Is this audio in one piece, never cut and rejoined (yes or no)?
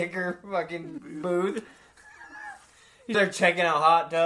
no